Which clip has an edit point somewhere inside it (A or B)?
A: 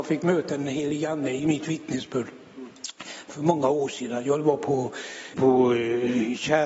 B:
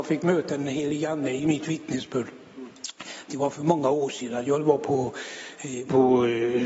A